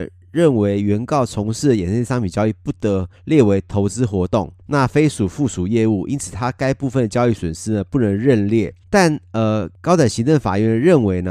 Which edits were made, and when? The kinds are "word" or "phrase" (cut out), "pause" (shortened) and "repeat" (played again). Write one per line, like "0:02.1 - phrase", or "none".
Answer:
0:03.1 - pause
0:04.6 - pause
0:08.8 - pause
0:09.7 - pause